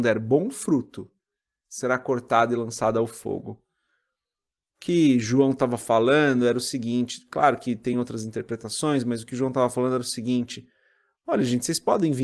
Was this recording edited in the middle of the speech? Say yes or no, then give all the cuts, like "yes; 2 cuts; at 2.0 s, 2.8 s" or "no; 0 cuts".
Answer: no; 0 cuts